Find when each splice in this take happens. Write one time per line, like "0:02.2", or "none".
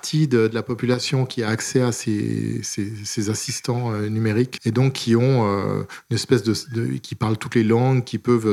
0:04.6